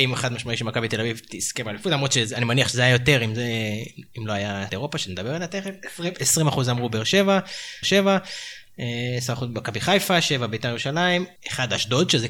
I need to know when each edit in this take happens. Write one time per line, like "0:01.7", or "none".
0:04.7
0:07.8
0:11.4